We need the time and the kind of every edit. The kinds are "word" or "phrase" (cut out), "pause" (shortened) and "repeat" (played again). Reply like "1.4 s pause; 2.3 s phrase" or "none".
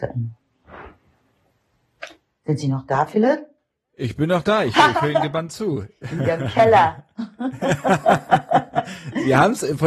none